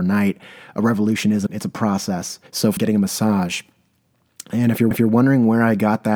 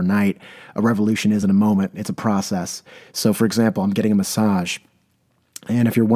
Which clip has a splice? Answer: first; 4 cuts; at 1.5 s, 2.5 s, 2.8 s, 4.9 s

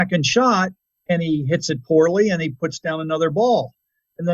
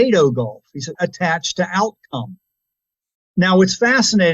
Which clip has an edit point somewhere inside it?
second; 1 cut; at 0.9 s

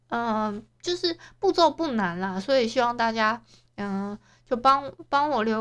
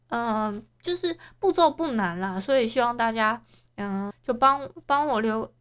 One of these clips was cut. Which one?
second; 1 cut; at 4.1 s

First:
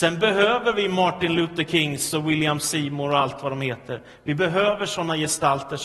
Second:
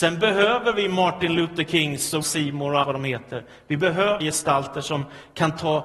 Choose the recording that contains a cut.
second; 3 cuts; at 2.2 s, 2.8 s, 4.2 s

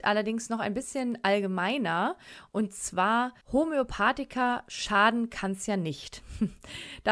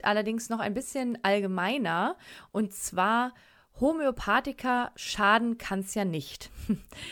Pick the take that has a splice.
first; 1 cut; at 3.4 s

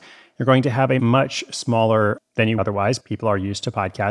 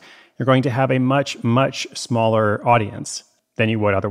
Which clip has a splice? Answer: first; 4 cuts; at 1.0 s, 2.2 s, 2.6 s, 3.0 s

